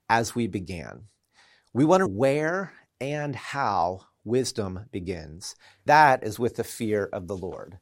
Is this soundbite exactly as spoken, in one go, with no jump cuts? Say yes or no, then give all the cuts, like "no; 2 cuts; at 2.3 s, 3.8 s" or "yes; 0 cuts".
no; 2 cuts; at 2.1 s, 5.9 s